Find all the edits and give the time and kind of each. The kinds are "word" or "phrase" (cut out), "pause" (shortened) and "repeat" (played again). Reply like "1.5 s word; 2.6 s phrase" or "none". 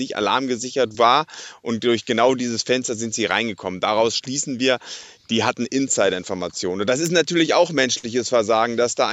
none